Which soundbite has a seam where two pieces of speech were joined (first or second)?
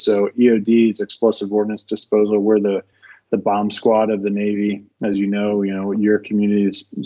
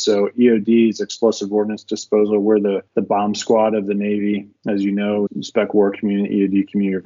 second